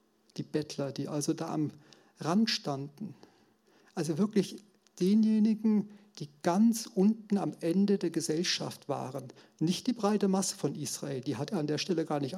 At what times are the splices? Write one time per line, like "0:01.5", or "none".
none